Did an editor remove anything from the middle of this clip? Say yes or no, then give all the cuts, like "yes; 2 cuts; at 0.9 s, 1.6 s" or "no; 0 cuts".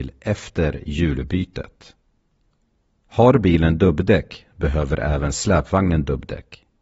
no; 0 cuts